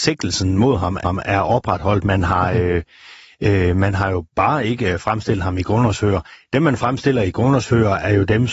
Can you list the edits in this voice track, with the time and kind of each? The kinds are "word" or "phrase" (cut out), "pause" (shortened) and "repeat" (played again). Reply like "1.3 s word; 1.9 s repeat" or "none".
1.0 s repeat; 4.3 s word